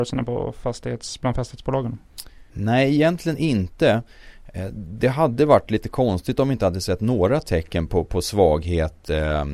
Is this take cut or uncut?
cut